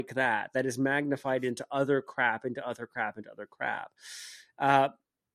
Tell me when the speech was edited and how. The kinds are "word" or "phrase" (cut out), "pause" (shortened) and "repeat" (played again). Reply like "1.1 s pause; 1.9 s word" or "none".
none

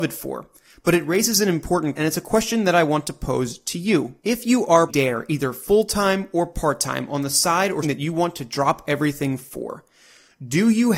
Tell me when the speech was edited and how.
1.9 s word; 4.2 s pause; 4.9 s phrase; 7.8 s word

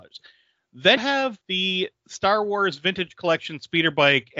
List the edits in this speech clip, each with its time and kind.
1.0 s word; 1.4 s pause

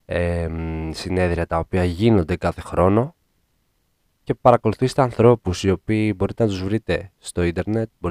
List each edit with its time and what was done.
none

